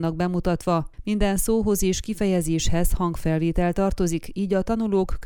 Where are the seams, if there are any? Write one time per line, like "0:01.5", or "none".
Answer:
none